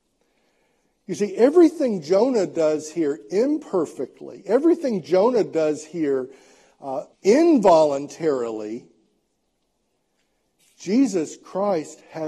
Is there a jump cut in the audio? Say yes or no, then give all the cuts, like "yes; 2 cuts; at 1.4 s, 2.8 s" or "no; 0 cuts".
yes; 1 cut; at 7.1 s